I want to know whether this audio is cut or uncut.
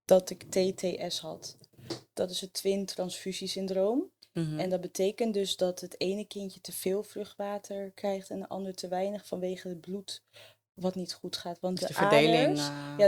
uncut